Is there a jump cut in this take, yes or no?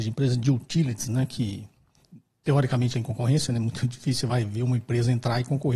yes